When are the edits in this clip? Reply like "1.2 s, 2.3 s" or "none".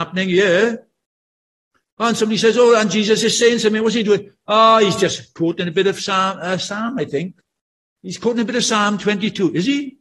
none